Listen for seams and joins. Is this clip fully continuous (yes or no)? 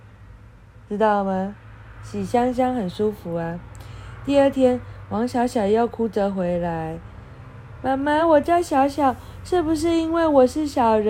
yes